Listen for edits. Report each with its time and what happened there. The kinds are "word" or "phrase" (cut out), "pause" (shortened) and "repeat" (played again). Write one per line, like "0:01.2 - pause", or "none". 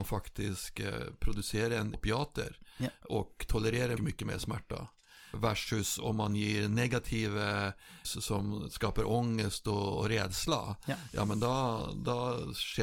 0:01.9 - word
0:04.0 - word
0:05.3 - word
0:08.0 - word